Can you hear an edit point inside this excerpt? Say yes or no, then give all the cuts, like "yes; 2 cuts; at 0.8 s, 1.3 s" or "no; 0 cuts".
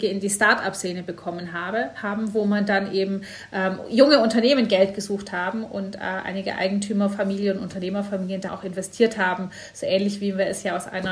yes; 1 cut; at 8.5 s